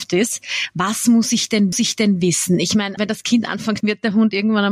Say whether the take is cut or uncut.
cut